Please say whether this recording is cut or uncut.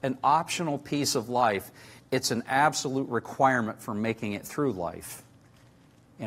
uncut